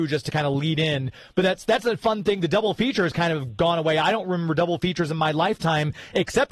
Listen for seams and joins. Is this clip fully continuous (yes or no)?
yes